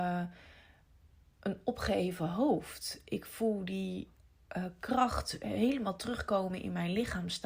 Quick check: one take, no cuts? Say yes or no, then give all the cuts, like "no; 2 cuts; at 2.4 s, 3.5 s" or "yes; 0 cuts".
yes; 0 cuts